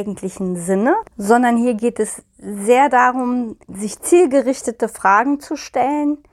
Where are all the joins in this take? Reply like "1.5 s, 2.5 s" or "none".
1.1 s, 3.6 s